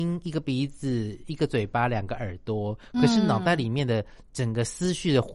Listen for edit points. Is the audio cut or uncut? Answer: uncut